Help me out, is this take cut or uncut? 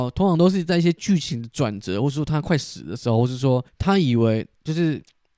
cut